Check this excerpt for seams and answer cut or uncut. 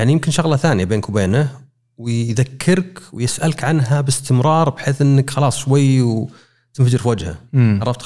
uncut